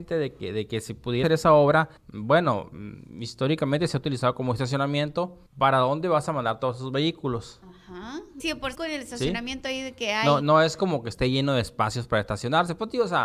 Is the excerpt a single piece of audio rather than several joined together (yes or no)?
no